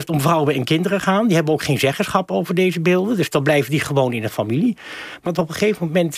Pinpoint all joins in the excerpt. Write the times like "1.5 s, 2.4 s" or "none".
5.3 s

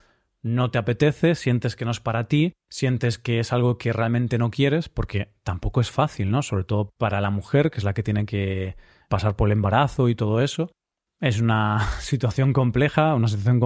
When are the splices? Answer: 9.0 s

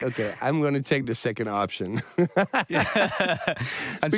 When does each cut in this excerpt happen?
none

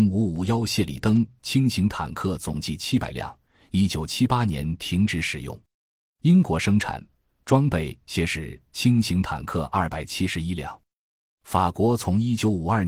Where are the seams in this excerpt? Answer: none

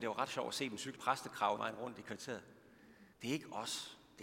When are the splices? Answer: 1.0 s, 1.6 s, 3.1 s

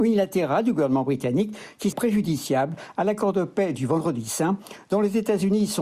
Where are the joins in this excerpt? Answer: 1.9 s

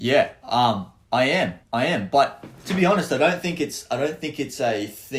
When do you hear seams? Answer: 1.0 s, 1.6 s

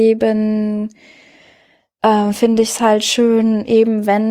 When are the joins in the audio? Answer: none

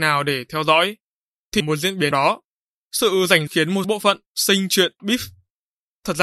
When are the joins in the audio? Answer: 1.6 s, 2.1 s, 3.5 s, 3.8 s, 5.0 s

